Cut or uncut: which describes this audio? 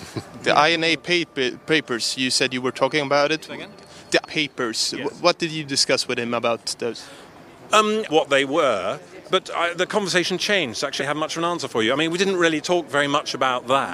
cut